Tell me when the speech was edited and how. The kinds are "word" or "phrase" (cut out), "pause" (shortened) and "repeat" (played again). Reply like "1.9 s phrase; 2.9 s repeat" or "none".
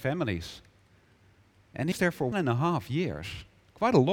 1.9 s word; 2.3 s word